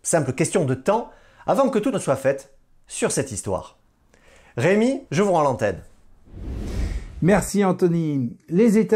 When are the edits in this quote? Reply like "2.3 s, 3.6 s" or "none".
1.9 s, 5.1 s